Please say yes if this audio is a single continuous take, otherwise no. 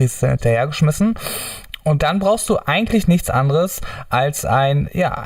yes